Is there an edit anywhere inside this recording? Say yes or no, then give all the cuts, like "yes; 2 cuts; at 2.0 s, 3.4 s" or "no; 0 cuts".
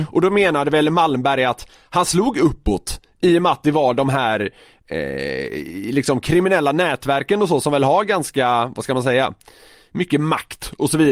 no; 0 cuts